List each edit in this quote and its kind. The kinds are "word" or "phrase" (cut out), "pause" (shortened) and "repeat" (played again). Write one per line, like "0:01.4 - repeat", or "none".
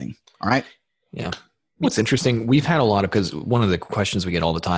0:01.8 - word
0:03.1 - word